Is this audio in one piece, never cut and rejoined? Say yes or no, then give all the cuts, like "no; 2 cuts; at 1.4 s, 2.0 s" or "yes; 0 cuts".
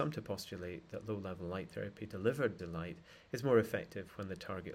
no; 1 cut; at 2.6 s